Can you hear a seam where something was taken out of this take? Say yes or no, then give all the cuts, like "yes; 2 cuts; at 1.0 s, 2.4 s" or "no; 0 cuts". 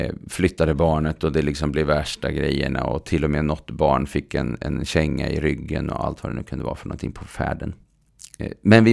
no; 0 cuts